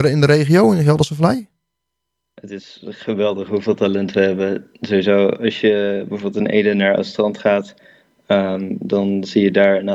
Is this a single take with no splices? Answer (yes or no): yes